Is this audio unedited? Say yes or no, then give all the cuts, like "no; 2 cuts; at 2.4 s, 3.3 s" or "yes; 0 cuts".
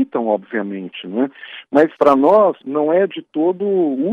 no; 2 cuts; at 1.9 s, 2.6 s